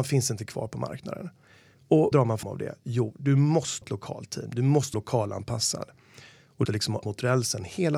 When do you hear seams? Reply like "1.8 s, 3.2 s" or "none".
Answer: 2.1 s, 2.4 s, 3.8 s, 4.9 s, 6.6 s, 7.0 s